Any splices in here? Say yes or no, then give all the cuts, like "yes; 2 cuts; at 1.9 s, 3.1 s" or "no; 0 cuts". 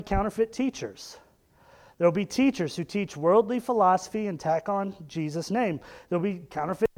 no; 0 cuts